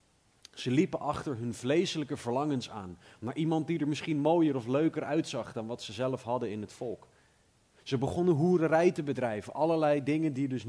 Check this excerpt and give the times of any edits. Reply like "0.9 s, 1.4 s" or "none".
none